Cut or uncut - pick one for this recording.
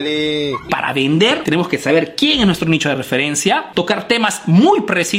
uncut